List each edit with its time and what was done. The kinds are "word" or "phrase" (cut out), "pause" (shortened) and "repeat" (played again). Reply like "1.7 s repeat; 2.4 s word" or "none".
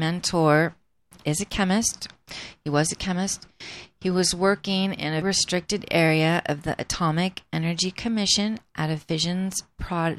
5.2 s word